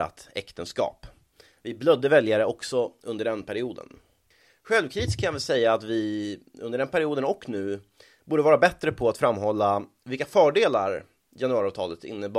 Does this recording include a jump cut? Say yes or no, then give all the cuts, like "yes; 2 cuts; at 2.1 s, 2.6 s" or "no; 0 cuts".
no; 0 cuts